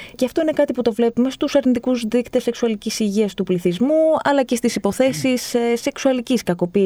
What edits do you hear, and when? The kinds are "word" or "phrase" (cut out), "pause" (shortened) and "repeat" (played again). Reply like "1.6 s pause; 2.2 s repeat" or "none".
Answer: none